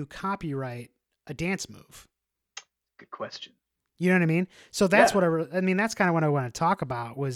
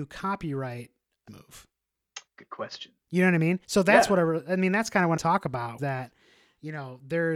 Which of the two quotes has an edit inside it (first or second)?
second